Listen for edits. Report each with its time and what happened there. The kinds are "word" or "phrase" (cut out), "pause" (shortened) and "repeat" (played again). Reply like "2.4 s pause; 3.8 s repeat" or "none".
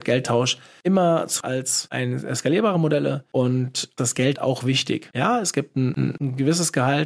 1.4 s phrase; 4.0 s phrase; 4.3 s word